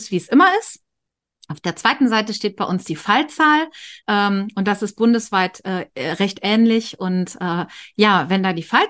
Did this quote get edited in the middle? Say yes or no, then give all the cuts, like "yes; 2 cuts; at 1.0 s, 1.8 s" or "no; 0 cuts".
yes; 1 cut; at 4.0 s